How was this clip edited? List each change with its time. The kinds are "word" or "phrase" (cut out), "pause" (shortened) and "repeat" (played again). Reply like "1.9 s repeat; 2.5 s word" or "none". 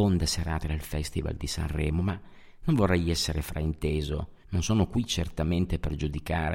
4.4 s pause